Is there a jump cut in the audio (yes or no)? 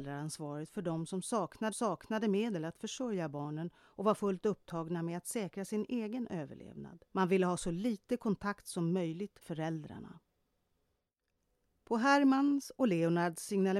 yes